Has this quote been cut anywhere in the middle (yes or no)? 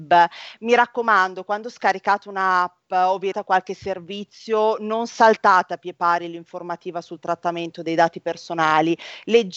yes